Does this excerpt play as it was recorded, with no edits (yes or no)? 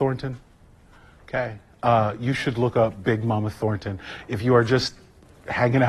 yes